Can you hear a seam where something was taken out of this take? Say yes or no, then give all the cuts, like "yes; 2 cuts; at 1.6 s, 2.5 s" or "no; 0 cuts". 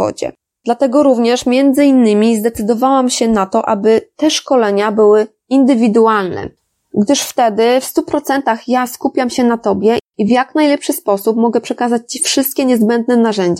no; 0 cuts